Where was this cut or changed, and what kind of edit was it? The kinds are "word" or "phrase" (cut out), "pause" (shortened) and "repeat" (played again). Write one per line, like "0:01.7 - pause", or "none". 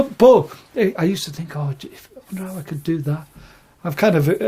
none